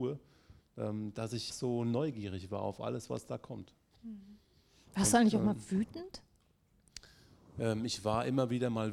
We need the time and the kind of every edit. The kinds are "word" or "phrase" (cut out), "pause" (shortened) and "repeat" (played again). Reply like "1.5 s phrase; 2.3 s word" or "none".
1.5 s word